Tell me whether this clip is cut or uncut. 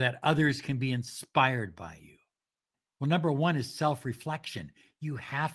uncut